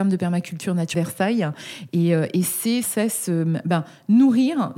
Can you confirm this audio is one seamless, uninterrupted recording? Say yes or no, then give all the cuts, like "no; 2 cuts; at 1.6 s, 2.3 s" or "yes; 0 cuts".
no; 2 cuts; at 0.9 s, 2.8 s